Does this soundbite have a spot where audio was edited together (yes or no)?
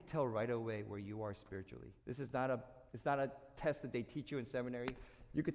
yes